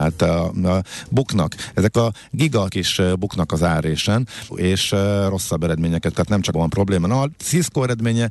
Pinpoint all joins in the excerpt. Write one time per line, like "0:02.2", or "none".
0:02.7
0:04.5
0:06.1
0:06.5